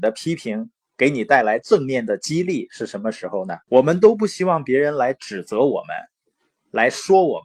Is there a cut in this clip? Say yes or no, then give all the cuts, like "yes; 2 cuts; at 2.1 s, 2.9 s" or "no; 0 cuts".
yes; 1 cut; at 3.6 s